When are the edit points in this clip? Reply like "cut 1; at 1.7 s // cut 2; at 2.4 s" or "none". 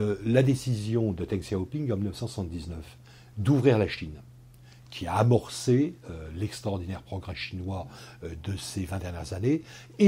none